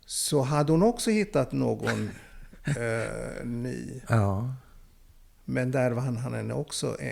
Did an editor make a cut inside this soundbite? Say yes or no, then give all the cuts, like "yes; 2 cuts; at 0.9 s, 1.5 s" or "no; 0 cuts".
no; 0 cuts